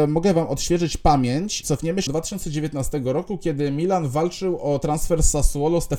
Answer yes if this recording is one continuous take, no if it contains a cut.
no